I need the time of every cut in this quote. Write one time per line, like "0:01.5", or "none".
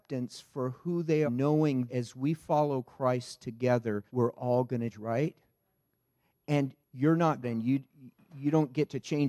0:01.3
0:01.9
0:04.1
0:04.9
0:06.8
0:07.4